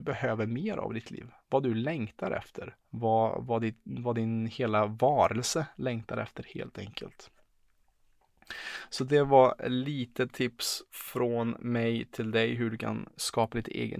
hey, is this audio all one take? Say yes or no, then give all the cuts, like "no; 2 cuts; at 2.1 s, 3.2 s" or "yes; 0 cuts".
no; 2 cuts; at 2.8 s, 10.9 s